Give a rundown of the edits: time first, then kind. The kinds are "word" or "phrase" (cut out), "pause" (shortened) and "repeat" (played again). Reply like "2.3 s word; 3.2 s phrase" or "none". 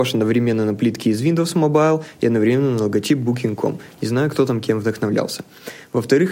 none